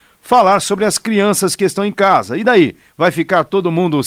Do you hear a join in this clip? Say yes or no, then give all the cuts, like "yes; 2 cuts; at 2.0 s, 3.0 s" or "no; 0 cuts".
no; 0 cuts